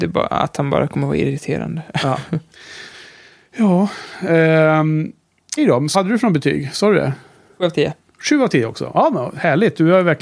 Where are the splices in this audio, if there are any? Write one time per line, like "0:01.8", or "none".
0:05.6
0:05.9